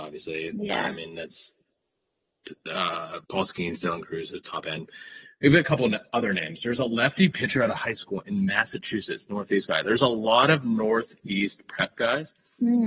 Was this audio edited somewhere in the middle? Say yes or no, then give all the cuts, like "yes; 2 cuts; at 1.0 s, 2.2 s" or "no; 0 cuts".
yes; 1 cut; at 3.2 s